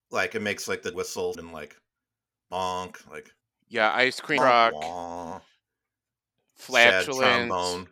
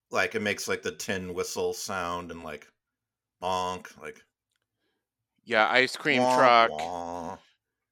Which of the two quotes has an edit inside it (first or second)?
first